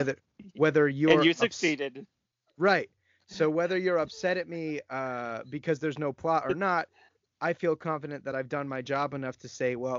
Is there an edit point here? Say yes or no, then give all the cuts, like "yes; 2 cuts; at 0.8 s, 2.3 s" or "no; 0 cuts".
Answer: no; 0 cuts